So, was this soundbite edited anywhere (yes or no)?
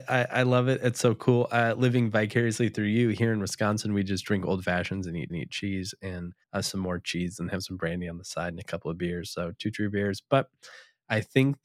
yes